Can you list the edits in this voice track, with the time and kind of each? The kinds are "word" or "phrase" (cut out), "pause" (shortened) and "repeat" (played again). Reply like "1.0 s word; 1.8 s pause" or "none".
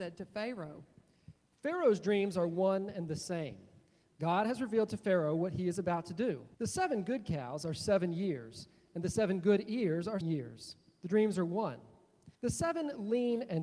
6.5 s pause; 10.2 s word; 12.3 s pause